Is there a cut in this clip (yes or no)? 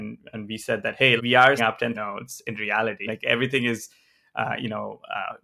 yes